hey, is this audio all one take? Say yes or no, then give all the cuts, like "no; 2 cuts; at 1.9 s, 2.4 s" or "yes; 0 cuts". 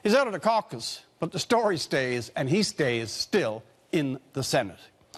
yes; 0 cuts